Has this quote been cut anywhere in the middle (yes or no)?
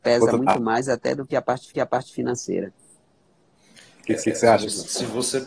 yes